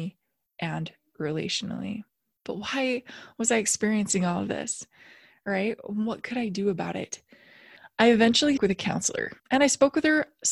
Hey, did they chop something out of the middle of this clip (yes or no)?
yes